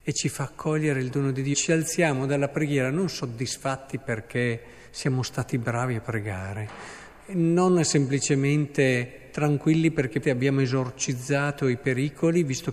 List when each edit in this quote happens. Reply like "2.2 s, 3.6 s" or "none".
1.5 s, 10.2 s